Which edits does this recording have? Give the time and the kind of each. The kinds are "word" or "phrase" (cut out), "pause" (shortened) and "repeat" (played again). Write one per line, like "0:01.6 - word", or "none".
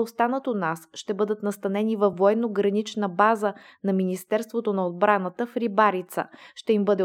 none